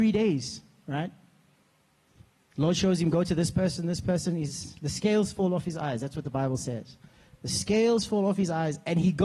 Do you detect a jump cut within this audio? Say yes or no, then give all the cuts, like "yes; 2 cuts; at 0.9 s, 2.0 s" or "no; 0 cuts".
no; 0 cuts